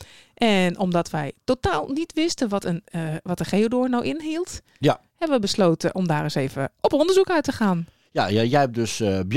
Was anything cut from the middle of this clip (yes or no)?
no